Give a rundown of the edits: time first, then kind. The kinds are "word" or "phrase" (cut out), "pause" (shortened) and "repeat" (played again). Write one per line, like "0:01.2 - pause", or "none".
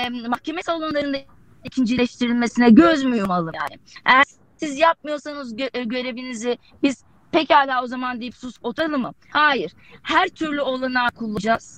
none